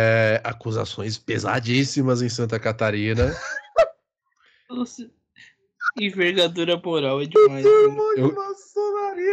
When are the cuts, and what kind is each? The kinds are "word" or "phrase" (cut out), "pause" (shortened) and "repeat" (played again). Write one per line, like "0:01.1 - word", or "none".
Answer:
none